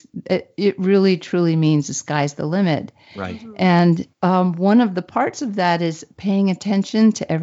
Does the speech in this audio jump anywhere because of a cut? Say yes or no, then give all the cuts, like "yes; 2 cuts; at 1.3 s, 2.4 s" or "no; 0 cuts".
yes; 1 cut; at 4.1 s